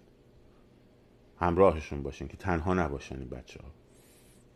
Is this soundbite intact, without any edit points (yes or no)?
yes